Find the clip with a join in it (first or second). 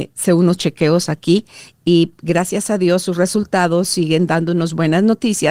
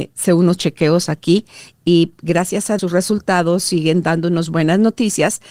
second